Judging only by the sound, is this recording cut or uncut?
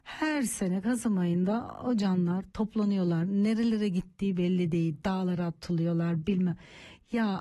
uncut